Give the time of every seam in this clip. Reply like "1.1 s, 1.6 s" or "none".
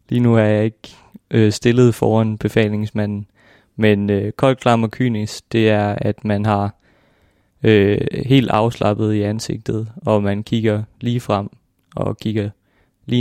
none

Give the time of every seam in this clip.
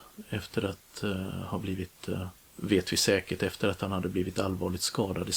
none

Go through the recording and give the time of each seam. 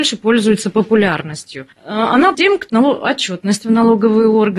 2.3 s, 2.7 s

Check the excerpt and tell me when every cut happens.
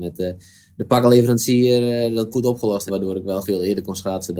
2.3 s, 2.9 s, 3.4 s

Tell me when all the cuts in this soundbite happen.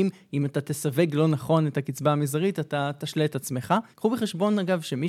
3.9 s

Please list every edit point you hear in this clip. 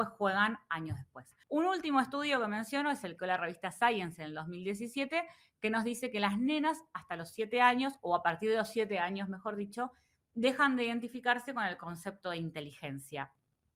1.4 s, 3.2 s

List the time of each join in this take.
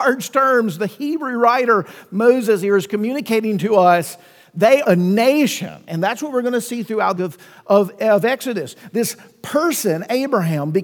4.8 s, 7.2 s

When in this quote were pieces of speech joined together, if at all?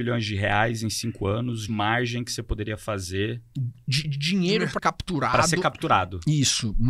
1.7 s, 4.0 s, 4.8 s

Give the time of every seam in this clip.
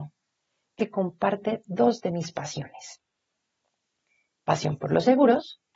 none

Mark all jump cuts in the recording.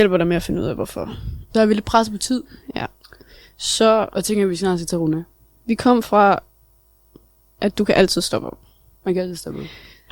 none

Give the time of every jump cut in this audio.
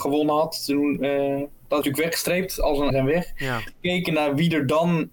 1.8 s, 2.9 s, 3.7 s

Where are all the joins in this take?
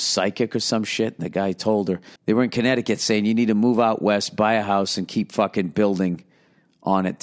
2.2 s

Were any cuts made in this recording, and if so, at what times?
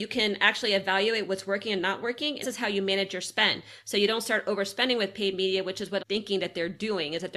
2.4 s, 6.0 s

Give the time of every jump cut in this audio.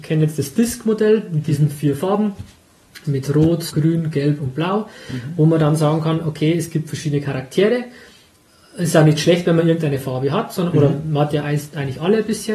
3.0 s, 3.7 s

